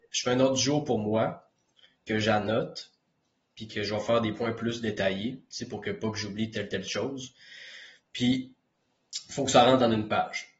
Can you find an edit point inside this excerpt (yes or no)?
no